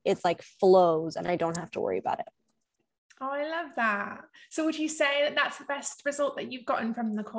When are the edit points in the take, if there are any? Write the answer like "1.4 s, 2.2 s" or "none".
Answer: none